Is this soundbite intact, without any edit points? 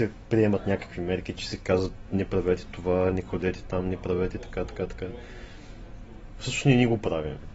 yes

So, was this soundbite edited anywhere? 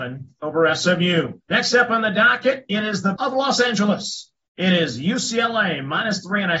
yes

